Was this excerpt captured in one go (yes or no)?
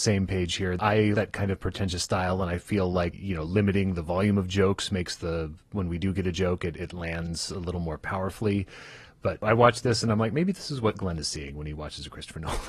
no